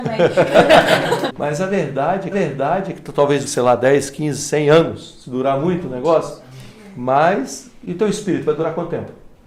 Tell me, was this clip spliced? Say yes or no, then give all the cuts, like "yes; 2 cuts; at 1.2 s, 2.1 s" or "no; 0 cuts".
yes; 2 cuts; at 2.3 s, 3.5 s